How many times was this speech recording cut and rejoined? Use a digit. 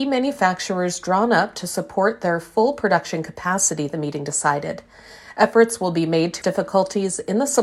1